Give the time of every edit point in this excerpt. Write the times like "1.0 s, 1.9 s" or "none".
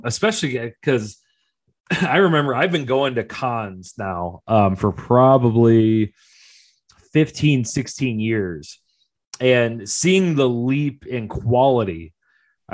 none